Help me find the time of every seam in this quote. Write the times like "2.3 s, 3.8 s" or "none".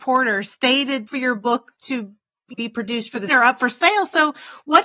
1.1 s, 2.5 s, 3.3 s